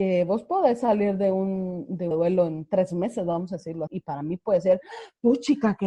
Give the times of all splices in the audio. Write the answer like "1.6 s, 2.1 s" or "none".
2.1 s, 3.9 s